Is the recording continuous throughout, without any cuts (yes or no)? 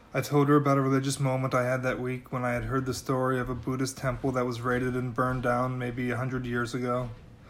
yes